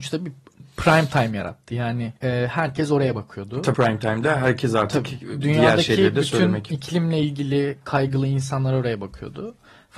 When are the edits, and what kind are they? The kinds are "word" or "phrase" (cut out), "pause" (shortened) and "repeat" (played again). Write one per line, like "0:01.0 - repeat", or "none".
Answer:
0:02.2 - pause
0:03.7 - word